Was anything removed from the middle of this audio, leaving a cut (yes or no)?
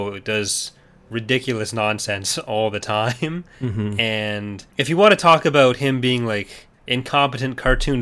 yes